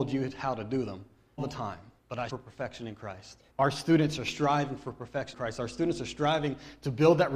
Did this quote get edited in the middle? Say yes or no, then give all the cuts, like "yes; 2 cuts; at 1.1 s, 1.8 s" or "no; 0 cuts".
yes; 5 cuts; at 1.4 s, 2.0 s, 2.3 s, 3.5 s, 5.3 s